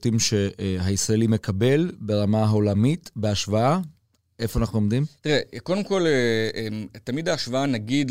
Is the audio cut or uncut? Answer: uncut